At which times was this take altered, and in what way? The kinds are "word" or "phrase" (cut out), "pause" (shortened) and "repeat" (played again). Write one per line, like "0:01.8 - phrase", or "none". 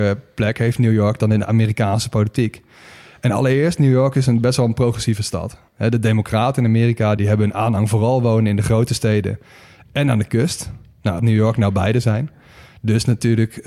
0:07.2 - word
0:11.2 - word